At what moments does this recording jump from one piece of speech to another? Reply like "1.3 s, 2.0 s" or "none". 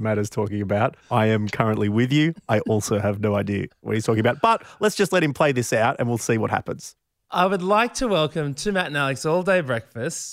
1.0 s

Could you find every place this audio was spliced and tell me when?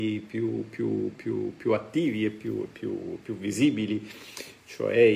none

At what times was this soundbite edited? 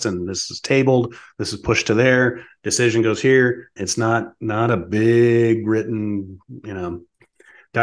3.8 s

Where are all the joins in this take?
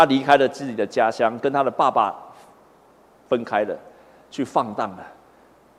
none

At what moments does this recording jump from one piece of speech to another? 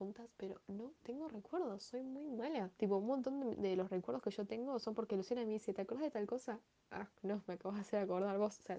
2.7 s, 7.1 s

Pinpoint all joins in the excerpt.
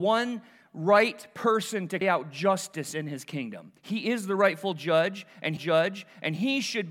2.0 s, 3.8 s, 5.6 s

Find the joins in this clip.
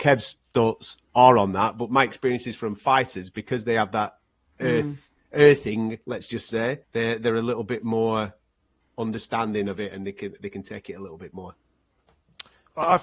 6.8 s

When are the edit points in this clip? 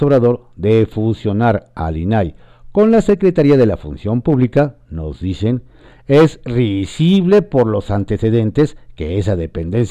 none

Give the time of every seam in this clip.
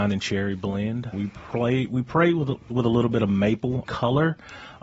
1.1 s, 2.7 s, 3.8 s

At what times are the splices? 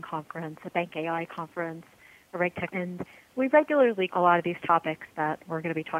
2.7 s, 4.1 s

